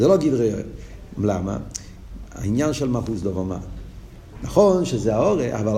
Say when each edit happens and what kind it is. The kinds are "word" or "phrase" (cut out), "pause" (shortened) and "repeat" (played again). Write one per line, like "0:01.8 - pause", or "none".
none